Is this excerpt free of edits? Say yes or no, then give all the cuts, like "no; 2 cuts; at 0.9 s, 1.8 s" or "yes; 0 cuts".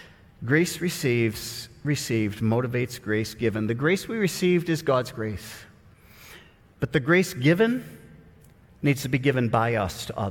yes; 0 cuts